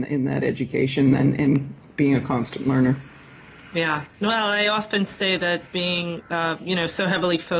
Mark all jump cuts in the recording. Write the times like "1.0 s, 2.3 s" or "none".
none